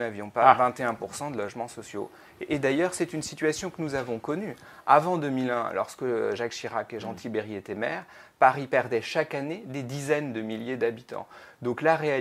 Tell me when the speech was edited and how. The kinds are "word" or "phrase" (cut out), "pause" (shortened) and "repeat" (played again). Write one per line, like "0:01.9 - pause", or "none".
none